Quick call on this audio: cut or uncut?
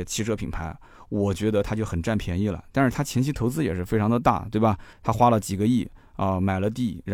cut